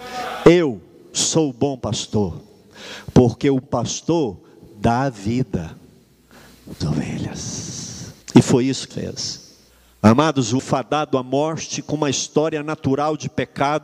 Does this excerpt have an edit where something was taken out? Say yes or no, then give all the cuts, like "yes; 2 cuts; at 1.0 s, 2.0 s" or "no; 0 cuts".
yes; 6 cuts; at 3.6 s, 6.8 s, 8.2 s, 8.9 s, 9.7 s, 10.6 s